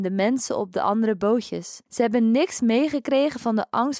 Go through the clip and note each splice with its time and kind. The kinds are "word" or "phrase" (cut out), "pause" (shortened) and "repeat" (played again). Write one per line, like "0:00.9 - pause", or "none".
0:01.9 - pause

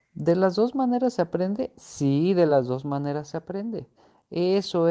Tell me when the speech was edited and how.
none

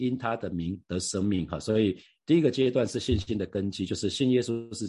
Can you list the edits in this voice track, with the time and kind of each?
none

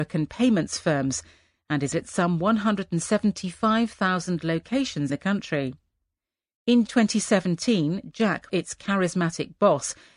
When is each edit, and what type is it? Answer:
0:01.9 - word
0:05.1 - word
0:06.9 - word
0:08.5 - word

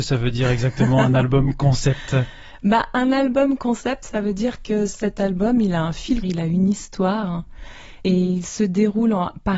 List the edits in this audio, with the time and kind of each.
0:06.2 - word

